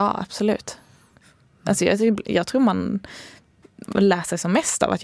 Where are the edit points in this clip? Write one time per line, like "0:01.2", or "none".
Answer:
none